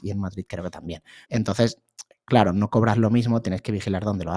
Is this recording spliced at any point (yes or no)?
yes